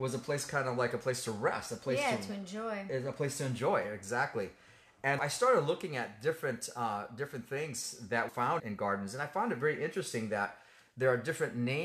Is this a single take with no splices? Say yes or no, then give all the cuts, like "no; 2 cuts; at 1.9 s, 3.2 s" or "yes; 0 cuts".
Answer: no; 3 cuts; at 5.2 s, 8.3 s, 8.6 s